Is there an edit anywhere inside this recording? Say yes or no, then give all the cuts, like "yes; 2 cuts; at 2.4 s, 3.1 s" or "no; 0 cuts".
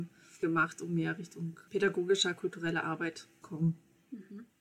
yes; 2 cuts; at 1.7 s, 3.4 s